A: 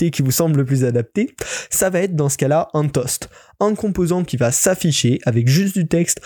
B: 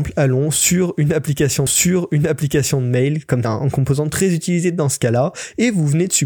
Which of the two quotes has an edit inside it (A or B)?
B